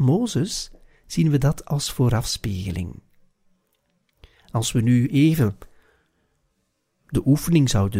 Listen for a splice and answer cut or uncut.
uncut